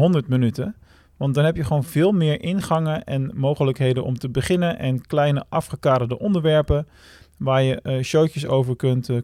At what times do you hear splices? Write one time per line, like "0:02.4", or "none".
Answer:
none

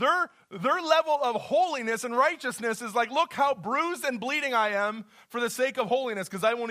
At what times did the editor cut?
none

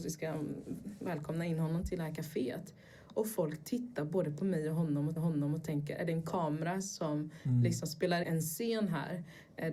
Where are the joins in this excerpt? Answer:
0:05.2
0:08.2

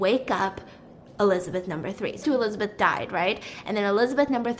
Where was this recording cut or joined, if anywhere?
0:02.2

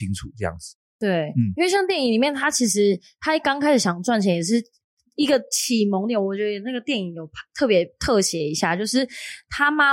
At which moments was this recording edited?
none

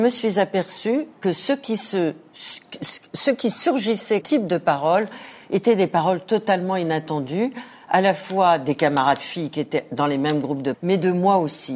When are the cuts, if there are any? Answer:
0:01.1
0:04.2
0:10.7

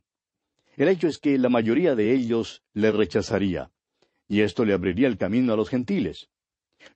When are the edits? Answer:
none

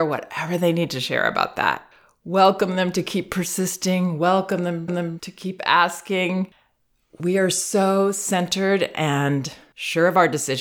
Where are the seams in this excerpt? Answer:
0:04.9

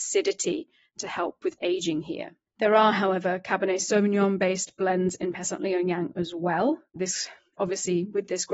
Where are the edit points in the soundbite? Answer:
0:01.6
0:02.5
0:07.6

